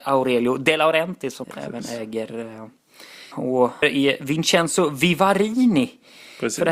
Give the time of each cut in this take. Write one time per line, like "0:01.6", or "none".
0:01.4
0:03.3
0:03.8